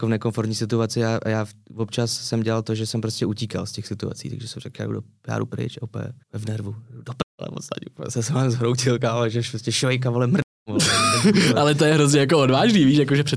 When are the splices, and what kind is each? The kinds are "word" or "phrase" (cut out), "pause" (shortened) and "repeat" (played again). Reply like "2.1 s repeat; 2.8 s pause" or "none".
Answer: 6.2 s pause